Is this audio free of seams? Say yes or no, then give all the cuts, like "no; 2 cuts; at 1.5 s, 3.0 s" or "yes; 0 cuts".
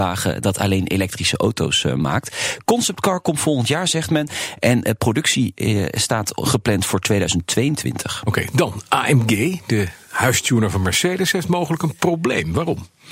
yes; 0 cuts